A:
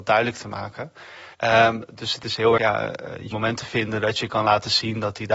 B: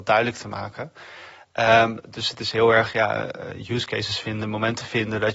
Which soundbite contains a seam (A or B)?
A